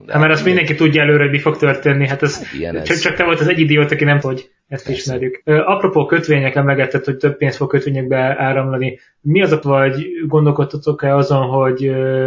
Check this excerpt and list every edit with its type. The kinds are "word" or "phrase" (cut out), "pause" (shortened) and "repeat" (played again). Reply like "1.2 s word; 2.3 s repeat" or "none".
4.2 s phrase; 4.6 s pause; 5.4 s pause; 9.6 s word

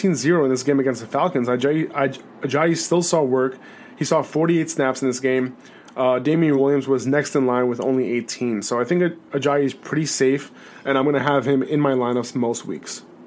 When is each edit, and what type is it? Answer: none

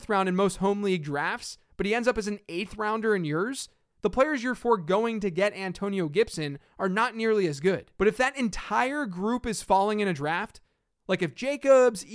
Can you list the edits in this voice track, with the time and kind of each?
7.9 s pause

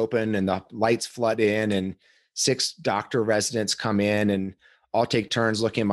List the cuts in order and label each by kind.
none

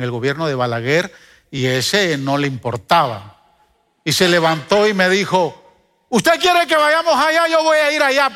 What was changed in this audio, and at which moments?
none

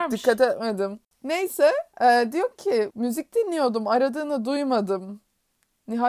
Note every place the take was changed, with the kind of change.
none

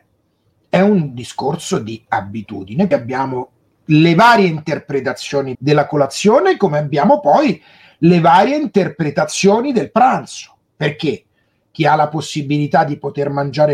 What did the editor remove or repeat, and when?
2.9 s word; 5.5 s word

